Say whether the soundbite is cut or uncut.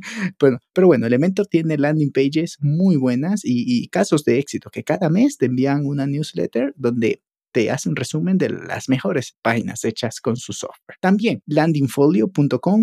uncut